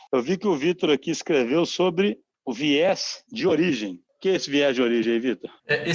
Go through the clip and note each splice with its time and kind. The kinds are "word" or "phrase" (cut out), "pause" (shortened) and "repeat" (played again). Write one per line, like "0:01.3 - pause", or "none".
none